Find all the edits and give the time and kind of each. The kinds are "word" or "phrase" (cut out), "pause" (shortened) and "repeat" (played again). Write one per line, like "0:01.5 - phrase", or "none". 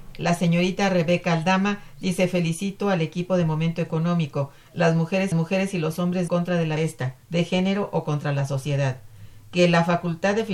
0:05.3 - repeat
0:06.3 - phrase
0:06.8 - phrase
0:07.2 - pause
0:09.4 - pause